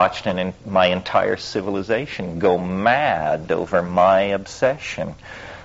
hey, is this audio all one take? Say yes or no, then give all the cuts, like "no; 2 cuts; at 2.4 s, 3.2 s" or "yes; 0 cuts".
yes; 0 cuts